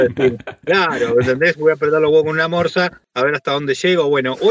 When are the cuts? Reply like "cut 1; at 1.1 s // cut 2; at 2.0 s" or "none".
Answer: none